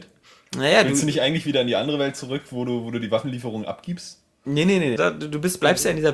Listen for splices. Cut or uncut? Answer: cut